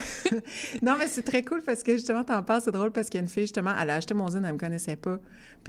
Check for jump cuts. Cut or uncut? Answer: uncut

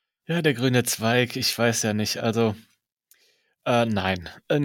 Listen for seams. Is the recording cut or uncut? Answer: uncut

